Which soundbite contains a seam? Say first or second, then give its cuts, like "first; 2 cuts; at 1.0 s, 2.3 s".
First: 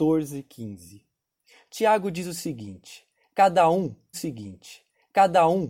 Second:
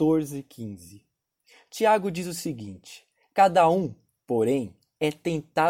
first; 1 cut; at 4.1 s